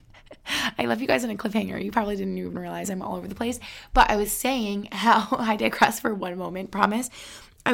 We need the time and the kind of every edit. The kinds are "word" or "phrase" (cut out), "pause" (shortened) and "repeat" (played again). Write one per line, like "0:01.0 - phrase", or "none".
none